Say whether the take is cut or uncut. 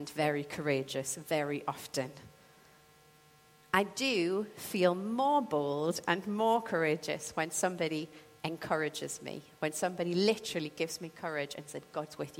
uncut